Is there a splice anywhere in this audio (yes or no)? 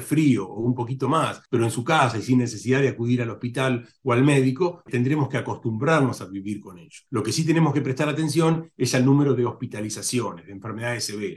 yes